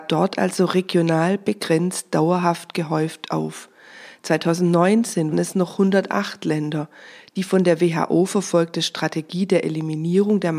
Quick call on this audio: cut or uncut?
cut